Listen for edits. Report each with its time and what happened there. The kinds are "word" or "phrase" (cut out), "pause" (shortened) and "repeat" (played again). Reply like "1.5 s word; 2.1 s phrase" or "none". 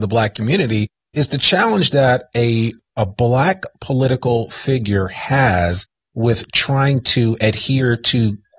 none